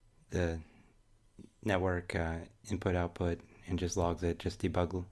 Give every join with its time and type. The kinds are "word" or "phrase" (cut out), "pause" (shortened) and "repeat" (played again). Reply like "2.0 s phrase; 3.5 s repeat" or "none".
none